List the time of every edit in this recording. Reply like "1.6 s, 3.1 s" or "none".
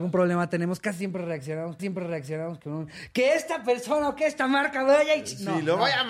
1.8 s